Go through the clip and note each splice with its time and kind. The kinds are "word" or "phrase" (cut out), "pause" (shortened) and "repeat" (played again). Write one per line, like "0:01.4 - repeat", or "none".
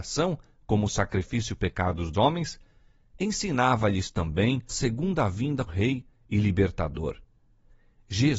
0:01.6 - word
0:02.1 - word
0:04.7 - word
0:05.7 - word